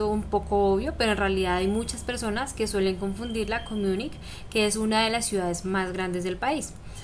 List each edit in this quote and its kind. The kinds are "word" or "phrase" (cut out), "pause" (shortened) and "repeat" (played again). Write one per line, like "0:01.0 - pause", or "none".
none